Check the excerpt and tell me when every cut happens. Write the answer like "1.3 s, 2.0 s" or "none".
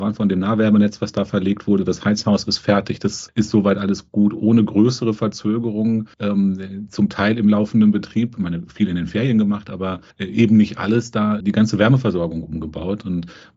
3.3 s, 6.1 s, 10.1 s, 11.4 s